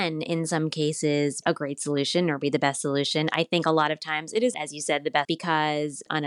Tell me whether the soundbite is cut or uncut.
cut